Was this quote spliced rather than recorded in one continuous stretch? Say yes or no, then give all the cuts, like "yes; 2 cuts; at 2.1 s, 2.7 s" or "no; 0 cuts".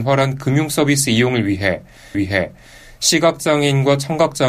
yes; 1 cut; at 2.1 s